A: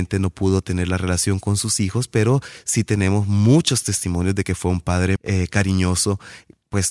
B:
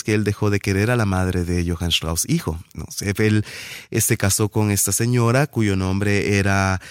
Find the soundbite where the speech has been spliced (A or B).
A